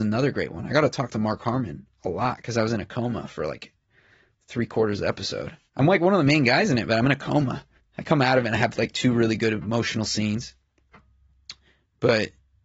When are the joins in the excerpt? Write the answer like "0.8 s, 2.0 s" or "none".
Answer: 5.7 s, 7.8 s